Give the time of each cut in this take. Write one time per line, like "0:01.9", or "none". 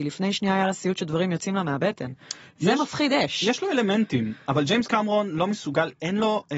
none